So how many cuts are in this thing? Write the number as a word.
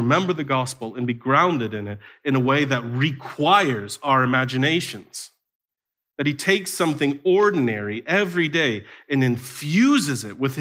zero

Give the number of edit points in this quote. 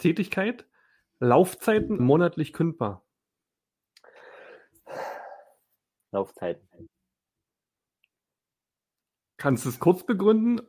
one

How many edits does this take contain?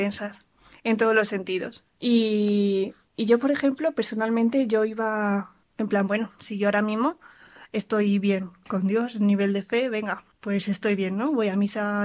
one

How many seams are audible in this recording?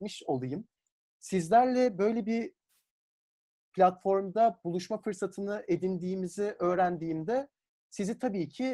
zero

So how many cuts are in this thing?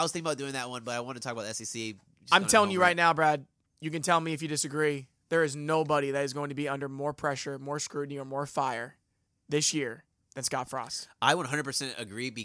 zero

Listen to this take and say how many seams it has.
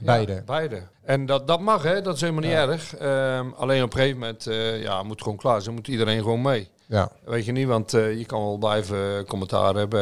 one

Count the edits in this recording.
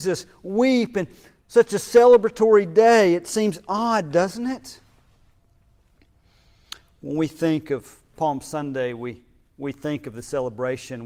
zero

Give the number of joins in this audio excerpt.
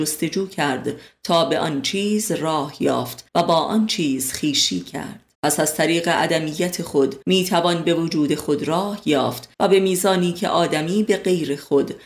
four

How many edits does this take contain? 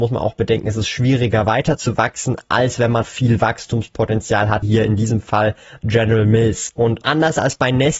four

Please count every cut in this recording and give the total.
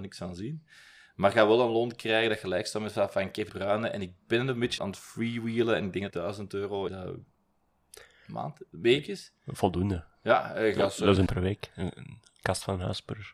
five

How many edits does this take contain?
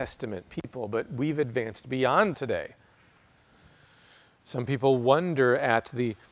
one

